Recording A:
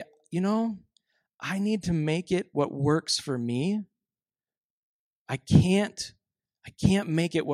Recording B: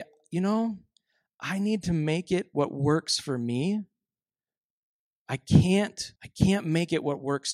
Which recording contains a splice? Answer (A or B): B